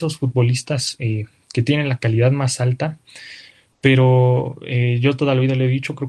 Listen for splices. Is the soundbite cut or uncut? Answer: uncut